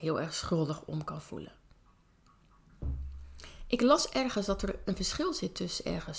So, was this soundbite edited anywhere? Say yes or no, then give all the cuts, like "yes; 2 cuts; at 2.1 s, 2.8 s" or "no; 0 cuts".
no; 0 cuts